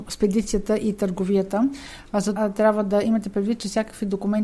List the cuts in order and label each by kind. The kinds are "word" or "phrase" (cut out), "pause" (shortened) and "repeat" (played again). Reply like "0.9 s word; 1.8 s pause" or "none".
2.4 s word